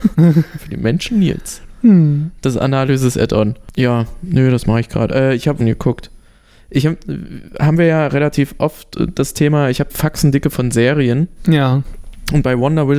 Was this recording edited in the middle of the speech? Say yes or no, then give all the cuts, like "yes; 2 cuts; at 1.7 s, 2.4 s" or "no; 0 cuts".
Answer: yes; 2 cuts; at 5.6 s, 9.9 s